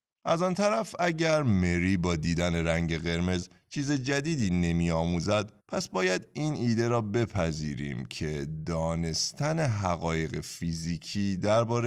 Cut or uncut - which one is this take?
cut